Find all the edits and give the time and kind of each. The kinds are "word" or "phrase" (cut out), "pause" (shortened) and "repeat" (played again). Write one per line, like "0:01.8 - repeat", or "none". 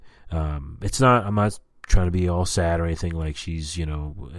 none